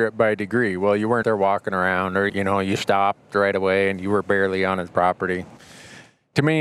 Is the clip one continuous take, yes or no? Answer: no